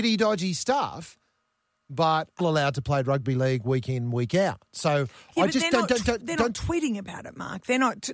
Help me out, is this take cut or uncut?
cut